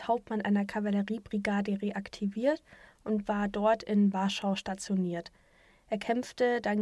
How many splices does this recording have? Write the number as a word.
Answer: zero